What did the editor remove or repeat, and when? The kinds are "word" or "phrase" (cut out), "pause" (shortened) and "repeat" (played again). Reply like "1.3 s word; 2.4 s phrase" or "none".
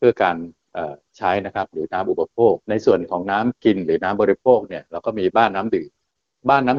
2.6 s pause